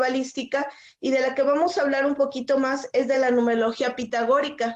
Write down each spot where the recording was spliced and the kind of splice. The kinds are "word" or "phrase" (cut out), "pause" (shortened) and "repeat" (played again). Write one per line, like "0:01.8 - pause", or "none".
none